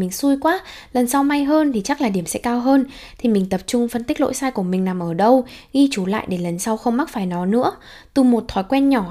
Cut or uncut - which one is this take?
uncut